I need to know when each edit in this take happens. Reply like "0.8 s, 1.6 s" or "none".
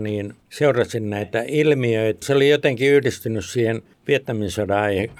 2.2 s